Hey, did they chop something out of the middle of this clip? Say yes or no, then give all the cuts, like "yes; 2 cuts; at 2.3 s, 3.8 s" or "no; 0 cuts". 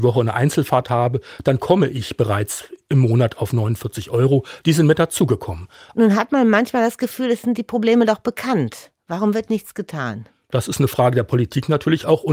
no; 0 cuts